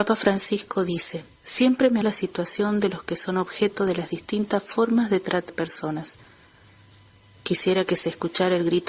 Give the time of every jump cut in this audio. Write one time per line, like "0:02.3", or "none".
0:01.4
0:02.0
0:05.5